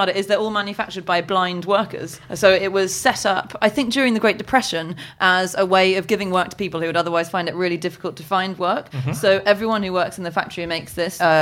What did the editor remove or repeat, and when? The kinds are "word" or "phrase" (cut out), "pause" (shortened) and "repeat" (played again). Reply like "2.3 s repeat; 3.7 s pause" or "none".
none